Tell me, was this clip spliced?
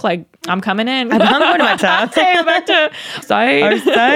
yes; 5 cuts; at 1.2 s, 1.8 s, 2.1 s, 2.4 s, 3.2 s

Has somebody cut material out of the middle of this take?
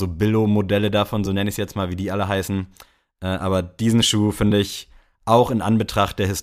no; 0 cuts

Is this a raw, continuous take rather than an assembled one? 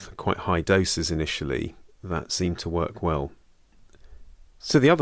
yes; 0 cuts

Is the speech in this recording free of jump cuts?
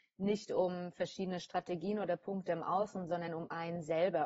yes; 0 cuts

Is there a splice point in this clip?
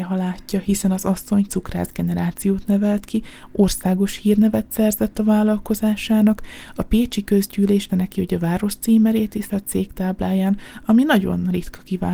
yes; 3 cuts; at 1.5 s, 7.9 s, 9.5 s

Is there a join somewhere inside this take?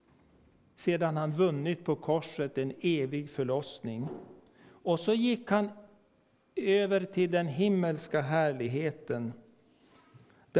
no; 0 cuts

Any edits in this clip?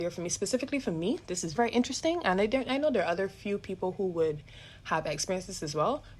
yes; 1 cut; at 1.6 s

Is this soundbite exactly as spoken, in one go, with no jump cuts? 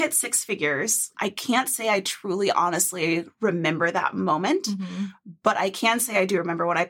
no; 1 cut; at 1.1 s

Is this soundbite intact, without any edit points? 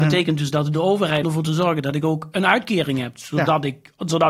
no; 1 cut; at 1.2 s

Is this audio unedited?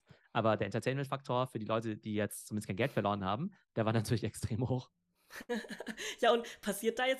yes; 0 cuts

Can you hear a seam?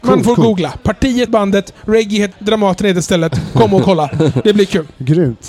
yes; 2 cuts; at 1.3 s, 2.3 s

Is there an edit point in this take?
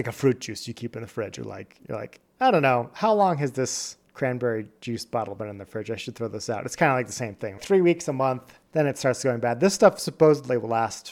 yes; 1 cut; at 7.6 s

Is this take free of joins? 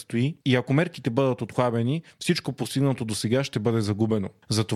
yes; 0 cuts

